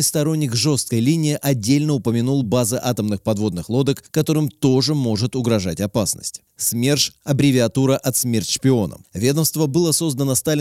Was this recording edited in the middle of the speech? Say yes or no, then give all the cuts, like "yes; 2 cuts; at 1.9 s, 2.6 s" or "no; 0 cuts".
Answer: no; 0 cuts